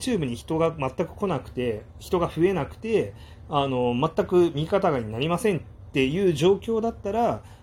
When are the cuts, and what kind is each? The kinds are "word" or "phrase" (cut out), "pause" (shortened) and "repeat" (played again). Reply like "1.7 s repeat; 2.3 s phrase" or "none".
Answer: none